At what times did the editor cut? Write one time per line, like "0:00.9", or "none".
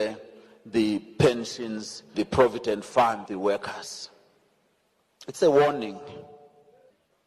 0:02.1
0:03.3